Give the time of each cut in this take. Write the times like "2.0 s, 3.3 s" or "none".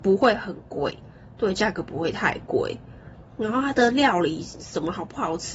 none